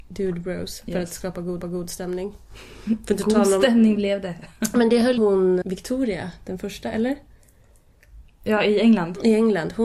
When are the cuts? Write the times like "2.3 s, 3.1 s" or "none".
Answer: 1.6 s, 5.2 s, 5.6 s